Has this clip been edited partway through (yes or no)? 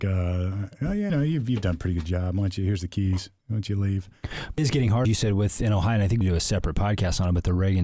yes